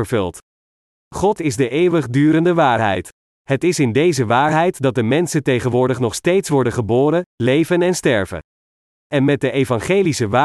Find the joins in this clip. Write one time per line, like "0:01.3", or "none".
0:01.4